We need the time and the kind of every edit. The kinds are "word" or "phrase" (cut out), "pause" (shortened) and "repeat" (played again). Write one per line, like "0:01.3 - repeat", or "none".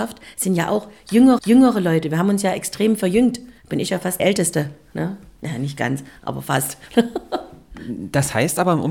0:01.4 - repeat
0:03.6 - pause
0:04.2 - phrase